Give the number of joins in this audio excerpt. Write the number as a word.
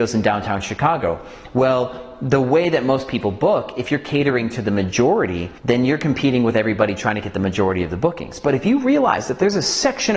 one